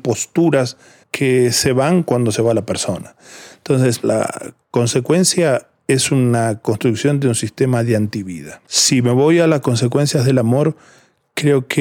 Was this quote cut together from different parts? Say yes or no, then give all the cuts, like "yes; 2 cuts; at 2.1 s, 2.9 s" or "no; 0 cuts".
yes; 1 cut; at 8.6 s